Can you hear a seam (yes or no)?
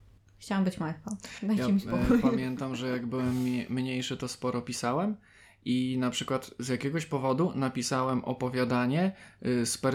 no